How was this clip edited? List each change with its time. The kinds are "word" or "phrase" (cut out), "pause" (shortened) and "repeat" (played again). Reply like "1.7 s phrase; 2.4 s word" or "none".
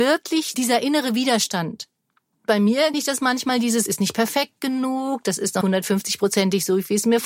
2.9 s word; 3.9 s word; 5.6 s word